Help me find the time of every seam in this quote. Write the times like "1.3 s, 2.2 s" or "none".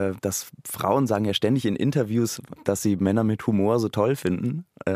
2.6 s